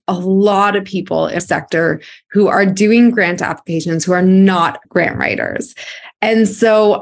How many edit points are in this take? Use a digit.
2